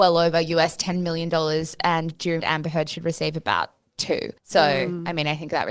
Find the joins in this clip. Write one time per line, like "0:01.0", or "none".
0:02.4
0:04.4